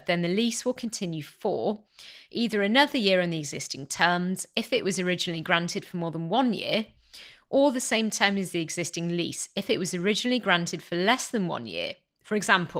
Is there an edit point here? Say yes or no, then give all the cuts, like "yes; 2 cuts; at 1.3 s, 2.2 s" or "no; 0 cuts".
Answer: no; 0 cuts